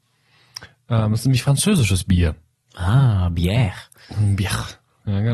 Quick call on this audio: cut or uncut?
uncut